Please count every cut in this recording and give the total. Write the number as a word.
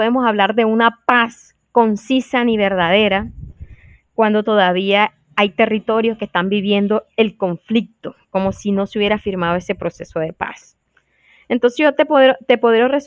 zero